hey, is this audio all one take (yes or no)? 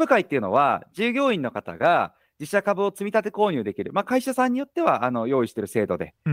yes